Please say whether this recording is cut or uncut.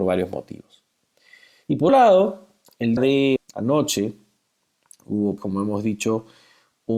cut